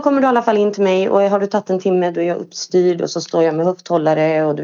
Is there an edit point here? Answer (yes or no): no